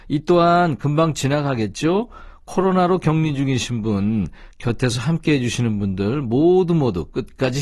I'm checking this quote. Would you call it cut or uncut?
uncut